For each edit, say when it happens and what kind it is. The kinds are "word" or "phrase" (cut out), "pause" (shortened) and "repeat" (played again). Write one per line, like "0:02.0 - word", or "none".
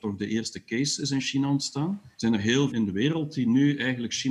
0:02.1 - pause
0:02.7 - phrase

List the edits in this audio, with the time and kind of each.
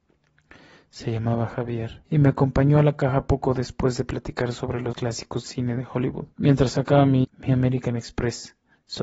0:02.0 - pause
0:04.9 - word
0:05.4 - word
0:06.3 - pause
0:07.3 - phrase

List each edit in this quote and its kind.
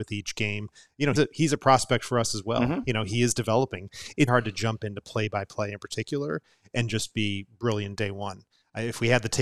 0:01.2 - word
0:04.3 - word

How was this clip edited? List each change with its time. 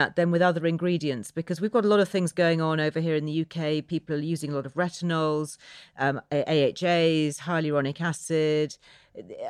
none

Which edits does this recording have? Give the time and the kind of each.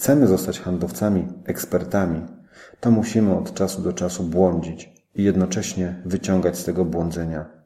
none

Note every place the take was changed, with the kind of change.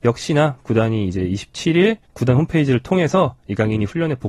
0:02.0 - pause

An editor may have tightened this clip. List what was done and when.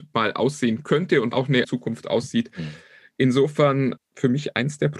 0:01.3 - word
0:01.6 - word
0:04.0 - word

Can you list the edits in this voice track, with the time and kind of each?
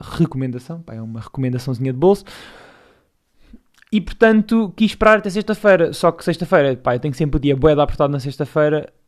none

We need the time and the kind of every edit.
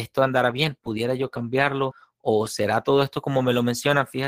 none

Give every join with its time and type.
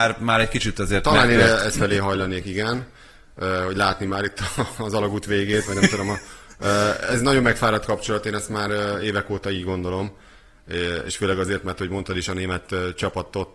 none

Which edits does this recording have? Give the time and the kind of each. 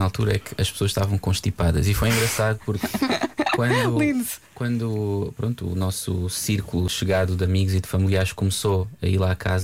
0:04.5 - pause

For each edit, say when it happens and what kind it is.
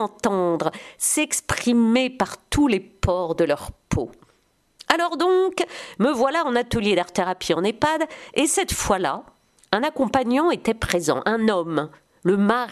none

